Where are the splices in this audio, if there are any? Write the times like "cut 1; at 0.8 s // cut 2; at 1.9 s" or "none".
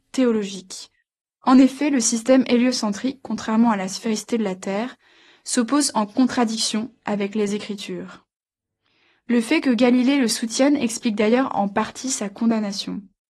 none